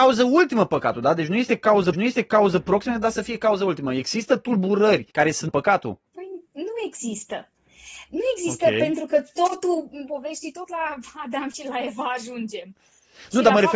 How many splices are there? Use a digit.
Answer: 5